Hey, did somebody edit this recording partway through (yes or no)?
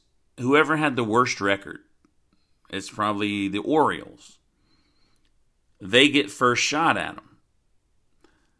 no